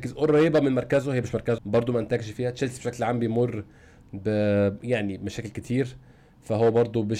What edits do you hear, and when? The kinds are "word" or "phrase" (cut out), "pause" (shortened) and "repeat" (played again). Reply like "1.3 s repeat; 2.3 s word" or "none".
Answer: 1.6 s word